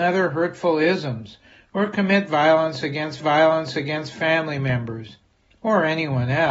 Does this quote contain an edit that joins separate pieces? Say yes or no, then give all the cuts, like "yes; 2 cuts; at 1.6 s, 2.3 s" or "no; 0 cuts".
yes; 1 cut; at 3.2 s